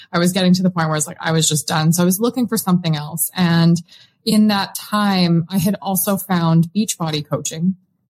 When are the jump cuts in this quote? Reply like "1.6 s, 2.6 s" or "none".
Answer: none